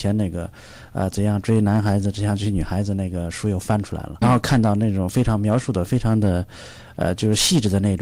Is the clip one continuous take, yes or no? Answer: no